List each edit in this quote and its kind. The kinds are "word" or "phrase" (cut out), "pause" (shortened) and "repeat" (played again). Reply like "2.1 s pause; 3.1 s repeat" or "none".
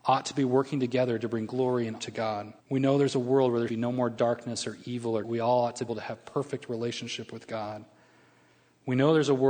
2.0 s word; 2.6 s pause; 3.7 s word; 5.2 s phrase; 5.9 s phrase